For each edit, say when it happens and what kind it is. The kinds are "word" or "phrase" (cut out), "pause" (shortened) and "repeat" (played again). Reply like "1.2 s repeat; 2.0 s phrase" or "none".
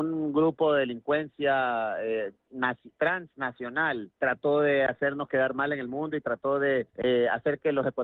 4.1 s pause; 6.9 s pause

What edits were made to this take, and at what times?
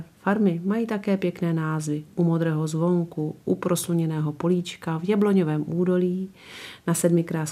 none

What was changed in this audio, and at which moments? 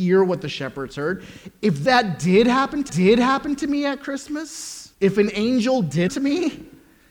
2.9 s repeat; 4.9 s pause; 6.1 s word

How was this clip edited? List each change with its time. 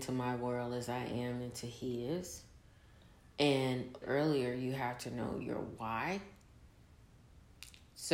4.0 s phrase

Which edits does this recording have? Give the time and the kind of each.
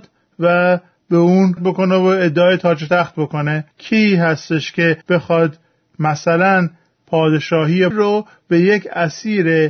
1.6 s word; 3.7 s pause; 5.0 s pause; 7.9 s word

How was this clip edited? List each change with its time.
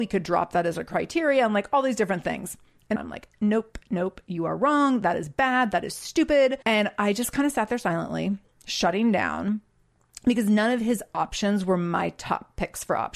3.0 s phrase; 3.3 s word; 6.6 s pause

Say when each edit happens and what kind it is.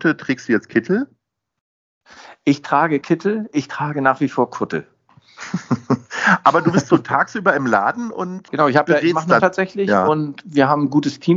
3.0 s word; 8.5 s word; 9.4 s word

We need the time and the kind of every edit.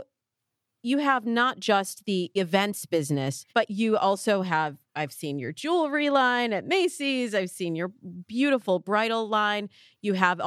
3.5 s pause; 4.9 s pause

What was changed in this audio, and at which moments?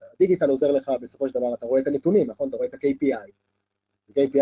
none

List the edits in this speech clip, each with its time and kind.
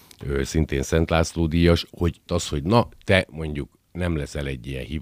2.3 s word

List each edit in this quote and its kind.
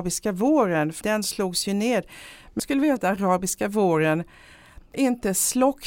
1.0 s word; 2.6 s word; 3.0 s word; 4.9 s word

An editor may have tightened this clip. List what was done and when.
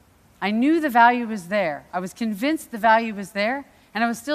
none

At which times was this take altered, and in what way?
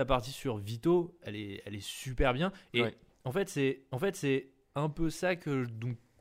3.9 s repeat

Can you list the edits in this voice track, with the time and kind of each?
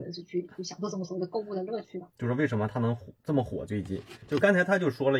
2.1 s pause

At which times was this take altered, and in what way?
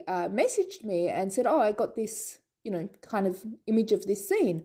none

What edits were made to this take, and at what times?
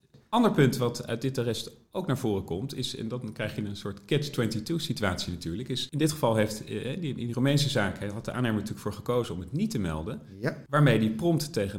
none

